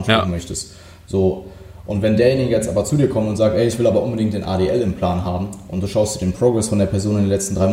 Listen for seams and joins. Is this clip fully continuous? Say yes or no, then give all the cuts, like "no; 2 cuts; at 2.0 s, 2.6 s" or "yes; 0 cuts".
yes; 0 cuts